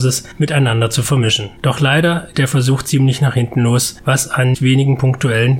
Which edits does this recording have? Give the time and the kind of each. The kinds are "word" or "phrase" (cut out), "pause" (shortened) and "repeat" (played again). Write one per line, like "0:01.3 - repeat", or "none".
0:01.6 - pause
0:02.3 - word
0:04.5 - word